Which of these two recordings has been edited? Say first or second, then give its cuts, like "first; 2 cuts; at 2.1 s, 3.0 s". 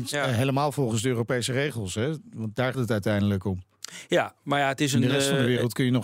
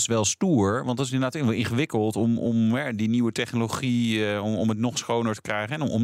first; 1 cut; at 2.7 s